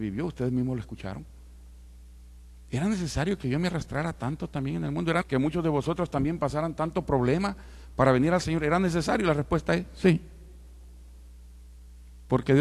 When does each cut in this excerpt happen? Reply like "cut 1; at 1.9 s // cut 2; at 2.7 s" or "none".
cut 1; at 5.2 s